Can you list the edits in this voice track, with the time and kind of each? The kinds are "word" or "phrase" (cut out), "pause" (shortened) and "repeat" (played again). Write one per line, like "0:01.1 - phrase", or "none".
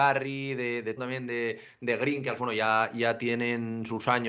0:01.0 - word
0:02.4 - phrase

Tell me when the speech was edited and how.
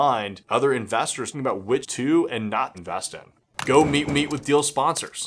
0:01.3 - word
0:01.8 - word
0:02.7 - word
0:04.1 - repeat

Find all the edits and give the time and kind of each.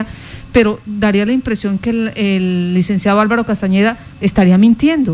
0:04.1 - pause

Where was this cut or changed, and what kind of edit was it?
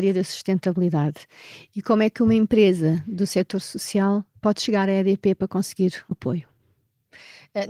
0:06.1 - word

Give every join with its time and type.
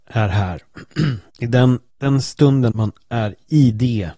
0:01.3 - pause
0:01.9 - pause
0:02.7 - word

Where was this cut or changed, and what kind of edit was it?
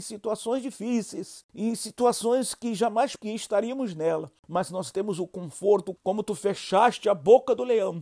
0:03.2 - word
0:06.0 - word

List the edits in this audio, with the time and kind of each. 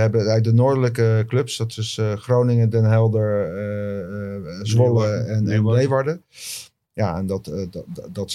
none

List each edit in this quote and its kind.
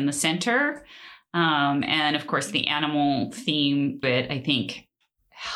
0:04.0 - word

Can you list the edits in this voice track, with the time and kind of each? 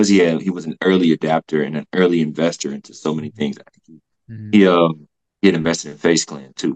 none

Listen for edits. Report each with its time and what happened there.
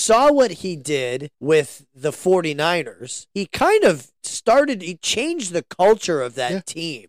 0:01.3 - pause
0:03.3 - pause
0:04.2 - pause

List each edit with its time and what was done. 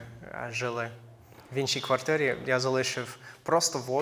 none

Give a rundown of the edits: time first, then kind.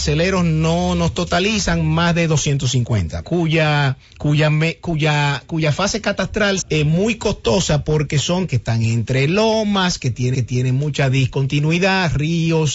0:03.2 - phrase
0:04.1 - pause
0:06.6 - word
0:08.5 - word
0:10.3 - repeat

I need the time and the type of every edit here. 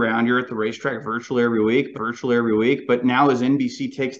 0:01.9 - repeat

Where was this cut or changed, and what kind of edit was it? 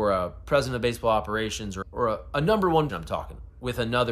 0:01.8 - word
0:02.9 - word

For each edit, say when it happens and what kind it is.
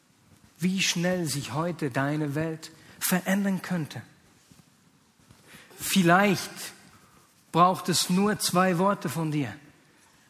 none

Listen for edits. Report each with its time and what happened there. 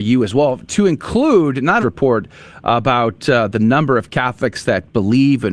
0:01.8 - phrase

